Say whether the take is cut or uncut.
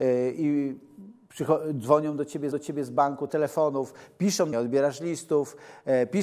cut